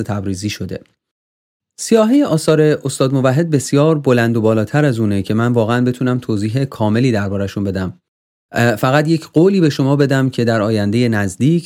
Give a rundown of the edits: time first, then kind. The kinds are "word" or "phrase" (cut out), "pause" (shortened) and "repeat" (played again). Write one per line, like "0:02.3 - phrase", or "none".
none